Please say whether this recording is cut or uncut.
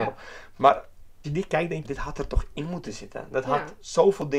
cut